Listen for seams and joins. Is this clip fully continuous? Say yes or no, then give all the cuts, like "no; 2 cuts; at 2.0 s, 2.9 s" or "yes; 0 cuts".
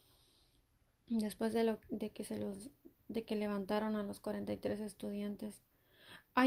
yes; 0 cuts